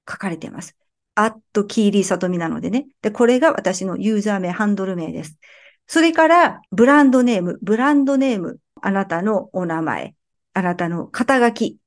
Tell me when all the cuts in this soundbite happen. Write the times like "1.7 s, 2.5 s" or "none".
6.7 s